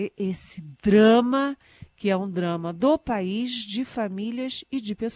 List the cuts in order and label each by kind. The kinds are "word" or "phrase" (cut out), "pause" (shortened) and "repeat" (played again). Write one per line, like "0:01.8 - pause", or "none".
none